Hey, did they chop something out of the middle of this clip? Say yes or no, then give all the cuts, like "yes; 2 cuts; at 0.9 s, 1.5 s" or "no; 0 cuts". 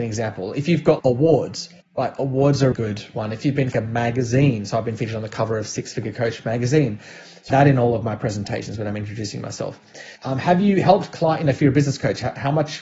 yes; 6 cuts; at 1.0 s, 1.8 s, 2.7 s, 3.7 s, 7.5 s, 10.2 s